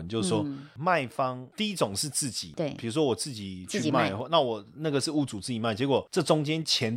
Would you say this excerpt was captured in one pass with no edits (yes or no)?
yes